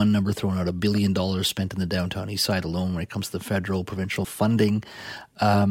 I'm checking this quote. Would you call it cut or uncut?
cut